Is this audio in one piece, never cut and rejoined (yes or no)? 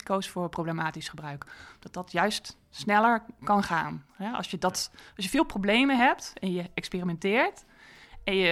yes